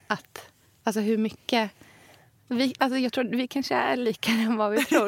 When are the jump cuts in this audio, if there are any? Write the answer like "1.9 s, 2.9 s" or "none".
none